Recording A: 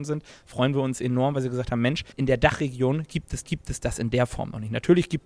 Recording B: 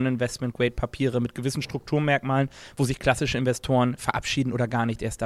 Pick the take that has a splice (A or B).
A